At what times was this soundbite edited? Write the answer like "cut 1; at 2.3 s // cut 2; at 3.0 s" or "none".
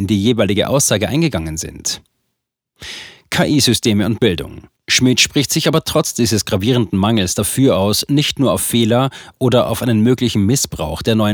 cut 1; at 4.8 s